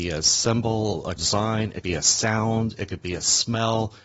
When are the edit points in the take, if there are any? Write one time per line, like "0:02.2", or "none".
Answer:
0:01.2
0:01.8